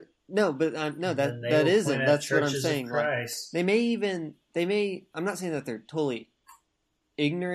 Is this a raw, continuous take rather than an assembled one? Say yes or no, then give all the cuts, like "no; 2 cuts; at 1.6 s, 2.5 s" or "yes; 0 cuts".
yes; 0 cuts